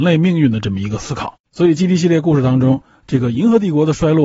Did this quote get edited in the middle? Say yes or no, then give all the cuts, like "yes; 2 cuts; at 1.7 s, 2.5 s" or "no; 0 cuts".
yes; 1 cut; at 1.5 s